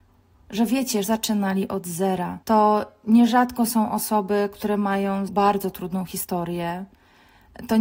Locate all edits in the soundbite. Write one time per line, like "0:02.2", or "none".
0:01.0
0:02.4
0:05.3